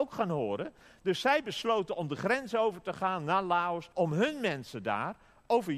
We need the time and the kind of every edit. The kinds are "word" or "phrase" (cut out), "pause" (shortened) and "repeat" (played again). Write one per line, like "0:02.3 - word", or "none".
0:03.9 - pause

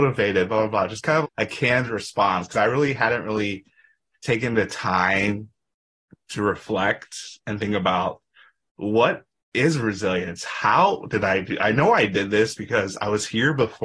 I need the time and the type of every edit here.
0:01.2 - word

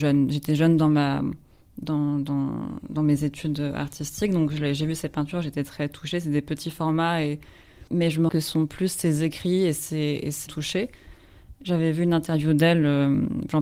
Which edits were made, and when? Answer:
0:07.9 - pause
0:08.3 - word
0:10.5 - phrase

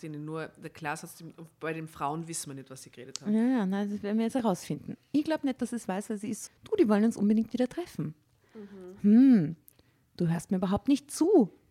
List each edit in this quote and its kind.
0:06.5 - word

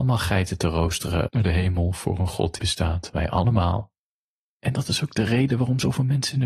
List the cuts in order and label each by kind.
0:01.3 - word
0:02.6 - word

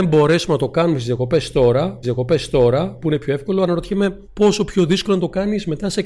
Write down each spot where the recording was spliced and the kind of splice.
0:02.0 - repeat
0:04.2 - pause

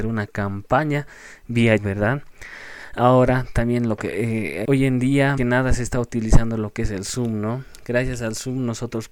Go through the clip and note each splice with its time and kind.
0:01.8 - word
0:04.6 - word
0:05.4 - phrase

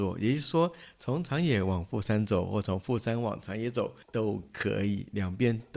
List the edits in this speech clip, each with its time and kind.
0:04.0 - pause

